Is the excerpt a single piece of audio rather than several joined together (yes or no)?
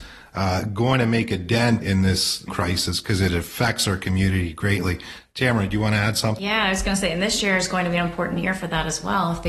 no